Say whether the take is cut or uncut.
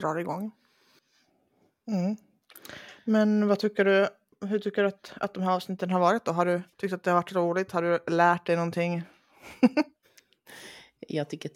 cut